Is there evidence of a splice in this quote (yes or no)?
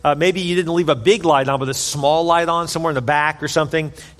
no